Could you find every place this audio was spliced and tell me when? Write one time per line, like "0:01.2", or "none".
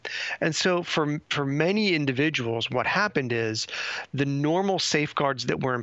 none